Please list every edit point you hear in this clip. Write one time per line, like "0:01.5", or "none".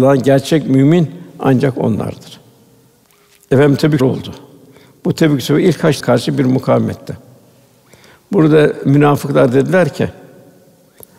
0:04.0
0:06.0